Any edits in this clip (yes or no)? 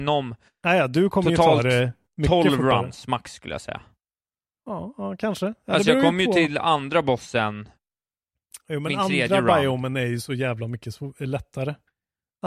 no